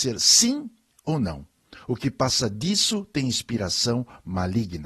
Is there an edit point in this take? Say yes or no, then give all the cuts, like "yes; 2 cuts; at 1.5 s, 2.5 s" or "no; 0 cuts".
no; 0 cuts